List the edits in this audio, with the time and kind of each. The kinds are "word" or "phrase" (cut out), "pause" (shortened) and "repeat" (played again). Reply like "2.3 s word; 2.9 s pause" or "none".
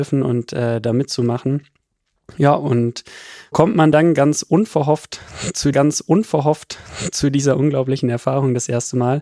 3.5 s word; 5.7 s repeat